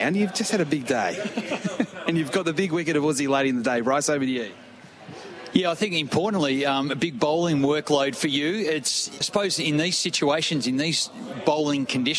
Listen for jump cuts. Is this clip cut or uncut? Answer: cut